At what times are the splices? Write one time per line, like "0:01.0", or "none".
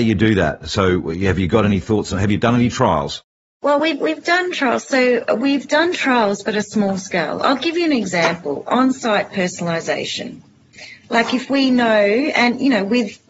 none